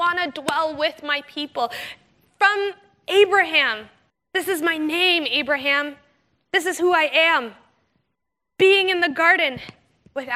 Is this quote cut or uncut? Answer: uncut